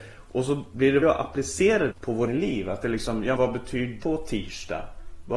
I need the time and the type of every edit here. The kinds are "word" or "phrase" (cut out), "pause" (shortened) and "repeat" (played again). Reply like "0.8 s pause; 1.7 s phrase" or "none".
1.0 s word; 1.9 s word; 2.3 s word; 2.8 s word; 3.4 s word; 4.0 s word